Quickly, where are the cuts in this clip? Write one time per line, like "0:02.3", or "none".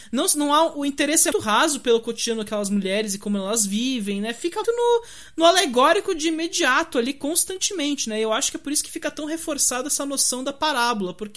0:01.3
0:04.6